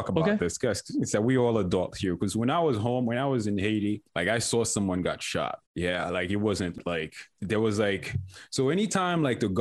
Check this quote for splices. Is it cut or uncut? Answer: cut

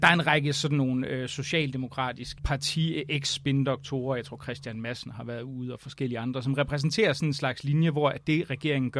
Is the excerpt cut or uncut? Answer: cut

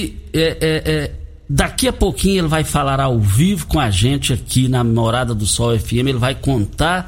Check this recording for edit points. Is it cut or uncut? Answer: uncut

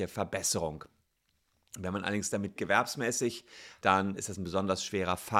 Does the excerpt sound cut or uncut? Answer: cut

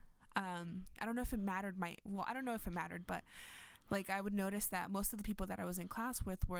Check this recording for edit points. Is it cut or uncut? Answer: uncut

